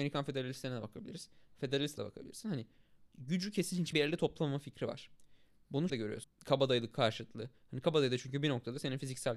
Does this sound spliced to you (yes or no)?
yes